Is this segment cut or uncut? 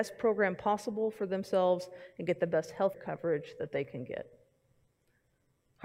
cut